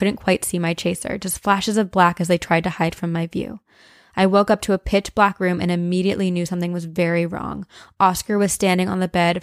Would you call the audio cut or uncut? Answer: uncut